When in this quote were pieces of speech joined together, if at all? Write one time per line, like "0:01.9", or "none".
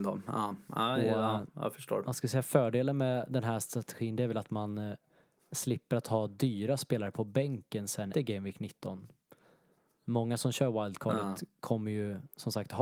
0:08.1